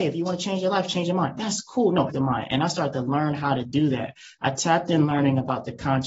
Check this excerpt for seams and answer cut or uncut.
cut